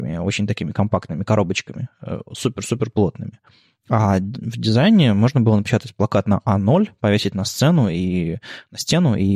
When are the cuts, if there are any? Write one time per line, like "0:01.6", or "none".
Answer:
none